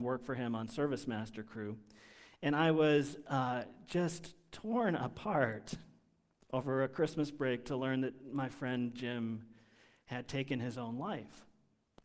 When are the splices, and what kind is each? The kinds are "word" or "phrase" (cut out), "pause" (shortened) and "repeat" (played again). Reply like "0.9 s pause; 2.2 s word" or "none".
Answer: none

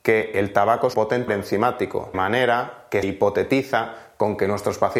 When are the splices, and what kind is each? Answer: 0.9 s word; 1.3 s word; 2.1 s word; 3.0 s word

